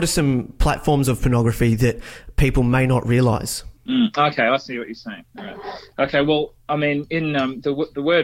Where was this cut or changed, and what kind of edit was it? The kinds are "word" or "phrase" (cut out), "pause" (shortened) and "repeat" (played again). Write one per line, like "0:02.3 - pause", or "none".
0:03.8 - pause